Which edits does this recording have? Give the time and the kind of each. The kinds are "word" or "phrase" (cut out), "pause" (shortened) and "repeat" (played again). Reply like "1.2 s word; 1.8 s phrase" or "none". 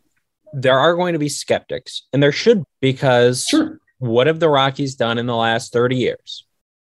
2.6 s word